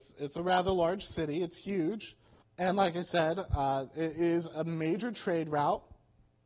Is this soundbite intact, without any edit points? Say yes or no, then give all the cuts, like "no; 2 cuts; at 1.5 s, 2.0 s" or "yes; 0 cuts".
no; 1 cut; at 2.4 s